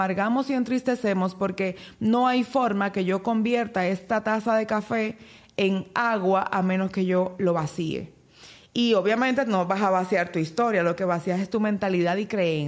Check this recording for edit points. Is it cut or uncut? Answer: uncut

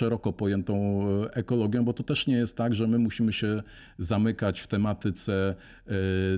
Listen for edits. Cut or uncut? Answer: uncut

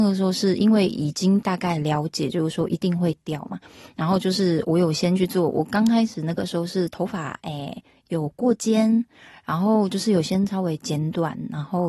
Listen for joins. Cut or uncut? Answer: uncut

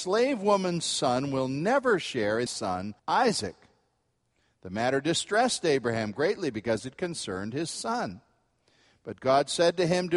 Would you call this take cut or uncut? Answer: cut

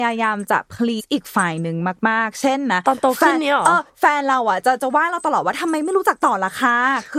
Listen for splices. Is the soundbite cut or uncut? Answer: cut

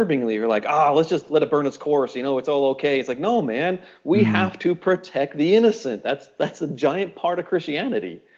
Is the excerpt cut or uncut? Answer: uncut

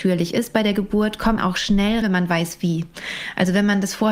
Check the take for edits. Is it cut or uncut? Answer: cut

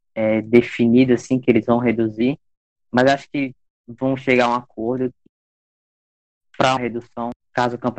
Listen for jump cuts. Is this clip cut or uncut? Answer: cut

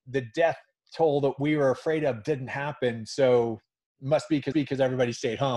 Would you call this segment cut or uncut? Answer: cut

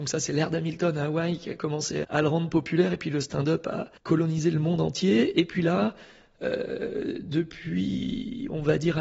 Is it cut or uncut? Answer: cut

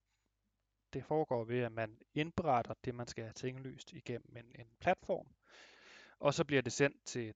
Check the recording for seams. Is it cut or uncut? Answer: cut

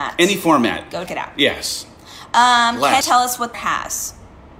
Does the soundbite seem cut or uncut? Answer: cut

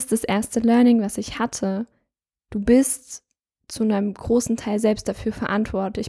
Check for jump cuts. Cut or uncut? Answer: uncut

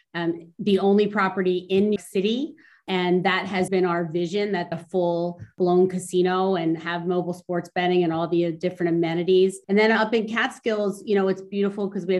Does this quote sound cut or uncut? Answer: cut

